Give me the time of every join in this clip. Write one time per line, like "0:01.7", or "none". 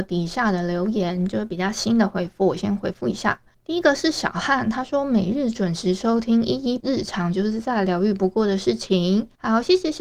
0:06.8